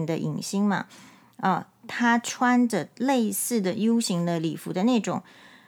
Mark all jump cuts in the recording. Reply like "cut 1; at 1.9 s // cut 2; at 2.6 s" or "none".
none